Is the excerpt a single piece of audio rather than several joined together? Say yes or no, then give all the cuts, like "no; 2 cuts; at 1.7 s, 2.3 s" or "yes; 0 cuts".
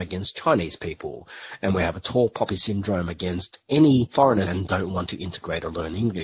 no; 1 cut; at 4.5 s